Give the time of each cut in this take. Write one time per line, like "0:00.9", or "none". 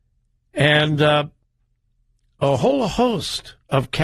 none